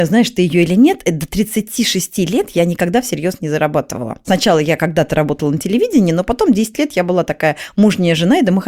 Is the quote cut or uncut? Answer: uncut